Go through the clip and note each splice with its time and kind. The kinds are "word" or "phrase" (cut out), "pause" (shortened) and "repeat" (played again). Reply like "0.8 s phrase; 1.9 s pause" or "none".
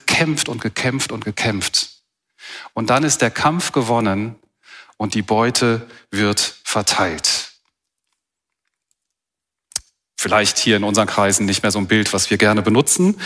none